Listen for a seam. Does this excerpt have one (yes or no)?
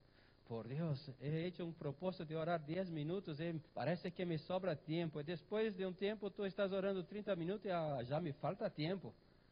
yes